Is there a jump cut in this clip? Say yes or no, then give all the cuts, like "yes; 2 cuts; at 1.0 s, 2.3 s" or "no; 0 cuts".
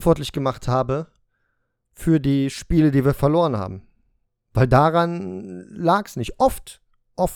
no; 0 cuts